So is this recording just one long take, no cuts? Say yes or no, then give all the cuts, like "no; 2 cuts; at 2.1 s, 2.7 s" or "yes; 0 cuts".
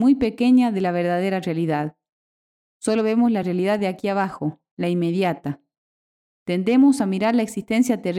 yes; 0 cuts